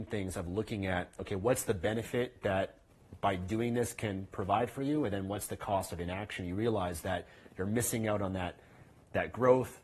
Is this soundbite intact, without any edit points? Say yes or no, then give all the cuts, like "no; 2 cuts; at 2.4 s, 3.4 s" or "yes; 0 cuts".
yes; 0 cuts